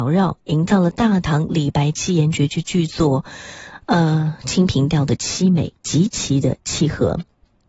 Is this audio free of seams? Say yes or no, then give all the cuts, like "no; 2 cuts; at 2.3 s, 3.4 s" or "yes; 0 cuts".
yes; 0 cuts